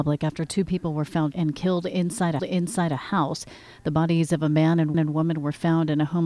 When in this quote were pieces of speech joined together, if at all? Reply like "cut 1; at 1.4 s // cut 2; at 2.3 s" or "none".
cut 1; at 1.3 s // cut 2; at 2.4 s // cut 3; at 4.9 s

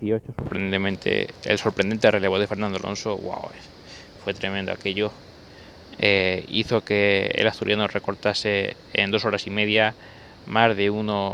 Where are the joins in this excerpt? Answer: none

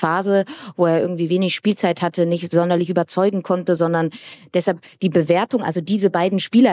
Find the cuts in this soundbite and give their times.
none

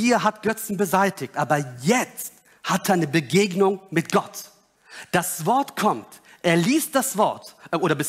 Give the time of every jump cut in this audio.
none

